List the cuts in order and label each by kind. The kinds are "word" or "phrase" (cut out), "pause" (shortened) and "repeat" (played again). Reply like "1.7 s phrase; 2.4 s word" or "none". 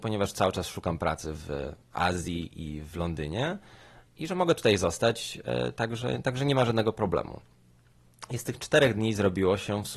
none